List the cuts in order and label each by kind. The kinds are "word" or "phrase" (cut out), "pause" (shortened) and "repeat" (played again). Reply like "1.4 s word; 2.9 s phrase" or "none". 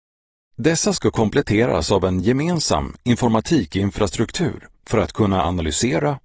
none